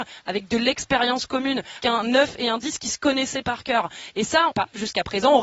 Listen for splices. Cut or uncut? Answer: cut